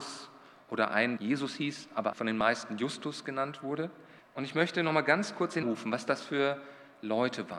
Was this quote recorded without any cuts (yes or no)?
no